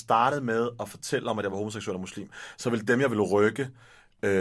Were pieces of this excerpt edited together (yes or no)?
no